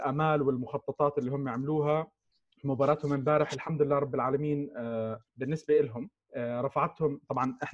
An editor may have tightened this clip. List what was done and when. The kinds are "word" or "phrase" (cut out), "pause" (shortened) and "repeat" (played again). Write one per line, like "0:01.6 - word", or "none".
0:02.3 - pause
0:05.3 - pause
0:06.2 - pause